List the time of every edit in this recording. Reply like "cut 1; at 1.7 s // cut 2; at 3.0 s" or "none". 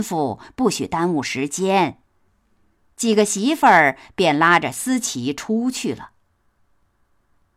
cut 1; at 2.1 s

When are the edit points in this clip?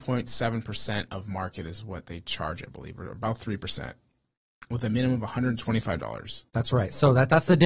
cut 1; at 6.5 s

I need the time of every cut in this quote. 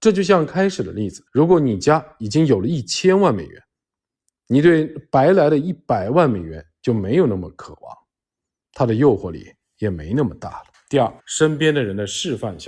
cut 1; at 1.3 s // cut 2; at 10.7 s // cut 3; at 11.2 s

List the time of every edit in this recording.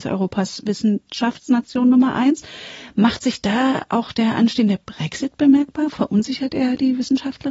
none

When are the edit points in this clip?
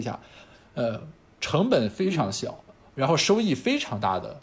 cut 1; at 2.6 s

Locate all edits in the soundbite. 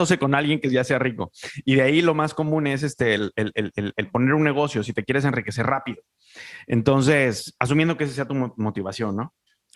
none

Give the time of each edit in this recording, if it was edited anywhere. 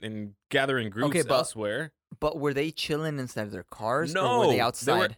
none

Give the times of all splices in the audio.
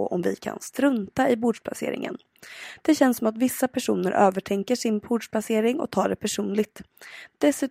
none

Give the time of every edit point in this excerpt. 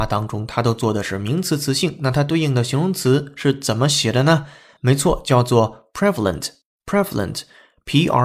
none

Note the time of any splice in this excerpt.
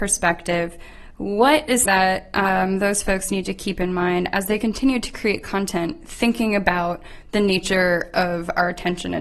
cut 1; at 1.9 s

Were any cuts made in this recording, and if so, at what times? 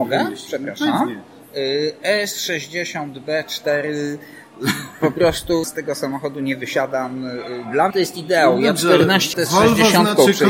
cut 1; at 5.6 s // cut 2; at 7.9 s // cut 3; at 9.3 s

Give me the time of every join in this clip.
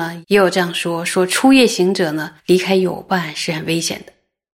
cut 1; at 2.4 s

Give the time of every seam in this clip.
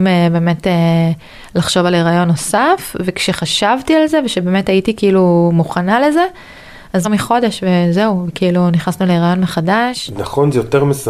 cut 1; at 7.0 s

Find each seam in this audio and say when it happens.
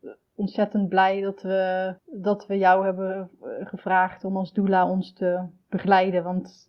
cut 1; at 2.0 s

